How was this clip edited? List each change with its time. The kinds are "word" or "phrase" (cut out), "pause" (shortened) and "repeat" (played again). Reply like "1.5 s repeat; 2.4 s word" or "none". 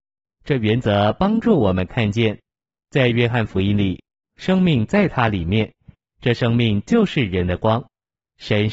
none